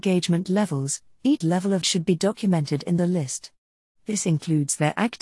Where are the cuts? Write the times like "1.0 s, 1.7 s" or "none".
1.4 s, 1.8 s, 3.0 s